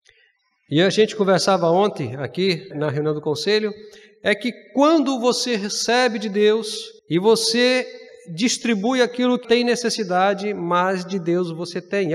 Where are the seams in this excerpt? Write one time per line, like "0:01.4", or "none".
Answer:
0:02.7
0:07.0
0:09.4